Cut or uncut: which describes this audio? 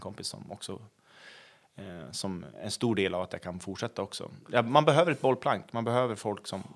uncut